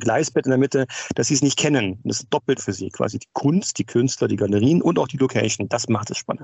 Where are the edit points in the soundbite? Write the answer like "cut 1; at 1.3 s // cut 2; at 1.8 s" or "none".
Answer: cut 1; at 2.6 s